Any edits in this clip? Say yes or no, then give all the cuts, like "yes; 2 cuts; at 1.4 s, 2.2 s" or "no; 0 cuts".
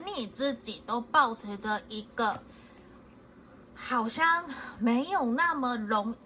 yes; 1 cut; at 3.6 s